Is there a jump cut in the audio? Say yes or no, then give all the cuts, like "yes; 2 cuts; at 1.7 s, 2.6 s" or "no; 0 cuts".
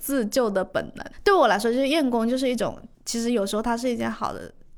yes; 1 cut; at 2.9 s